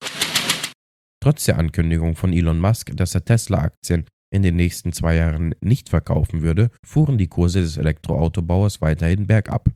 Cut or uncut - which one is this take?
cut